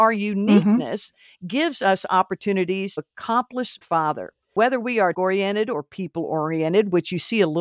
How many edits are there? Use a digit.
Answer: 4